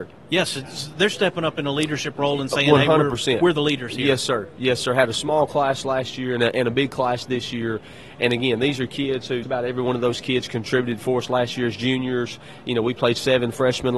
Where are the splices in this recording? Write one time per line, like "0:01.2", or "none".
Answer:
0:09.4